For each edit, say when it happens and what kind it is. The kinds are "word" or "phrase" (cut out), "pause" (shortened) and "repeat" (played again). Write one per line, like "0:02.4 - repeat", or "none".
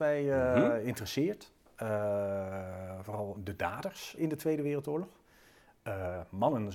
0:03.4 - word
0:04.2 - word